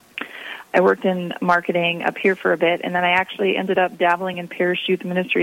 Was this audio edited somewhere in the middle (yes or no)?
no